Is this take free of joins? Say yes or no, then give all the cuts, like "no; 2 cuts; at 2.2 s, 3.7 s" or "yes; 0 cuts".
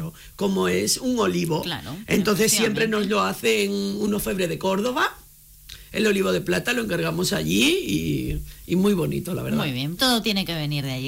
no; 1 cut; at 10.0 s